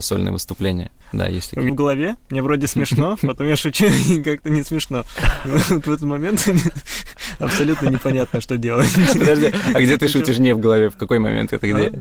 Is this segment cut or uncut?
cut